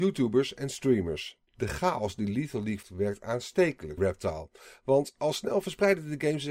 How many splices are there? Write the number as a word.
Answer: three